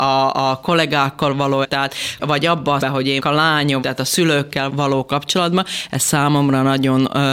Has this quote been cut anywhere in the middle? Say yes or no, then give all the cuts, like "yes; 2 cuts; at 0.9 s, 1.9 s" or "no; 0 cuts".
yes; 6 cuts; at 1.6 s, 2.2 s, 2.8 s, 3.2 s, 3.8 s, 4.7 s